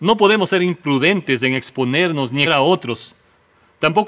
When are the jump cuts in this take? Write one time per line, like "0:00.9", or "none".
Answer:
0:02.4